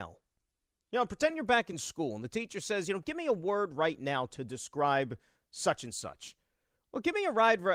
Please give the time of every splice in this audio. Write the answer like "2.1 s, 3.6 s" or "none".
none